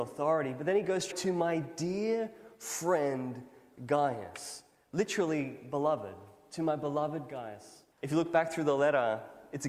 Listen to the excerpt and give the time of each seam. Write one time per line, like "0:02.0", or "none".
0:01.1
0:07.9